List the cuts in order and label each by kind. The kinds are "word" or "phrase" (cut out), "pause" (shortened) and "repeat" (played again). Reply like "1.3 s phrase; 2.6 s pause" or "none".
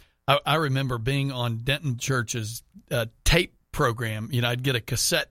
2.0 s word; 3.2 s pause